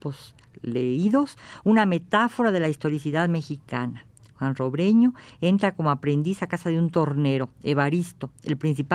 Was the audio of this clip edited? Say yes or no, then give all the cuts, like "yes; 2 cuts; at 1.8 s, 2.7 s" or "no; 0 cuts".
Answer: no; 0 cuts